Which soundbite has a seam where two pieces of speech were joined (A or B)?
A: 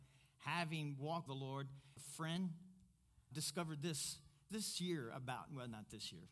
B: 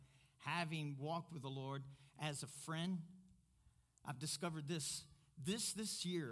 A